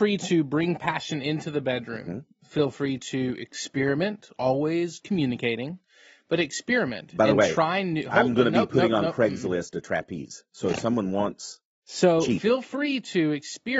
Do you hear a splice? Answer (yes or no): no